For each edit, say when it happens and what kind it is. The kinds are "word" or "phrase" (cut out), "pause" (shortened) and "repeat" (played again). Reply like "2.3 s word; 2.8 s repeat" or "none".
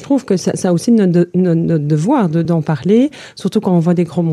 2.4 s word